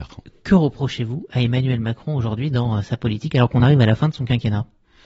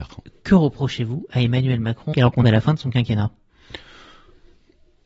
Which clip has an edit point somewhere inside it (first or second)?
second